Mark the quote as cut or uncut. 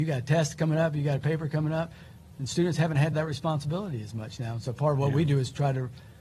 cut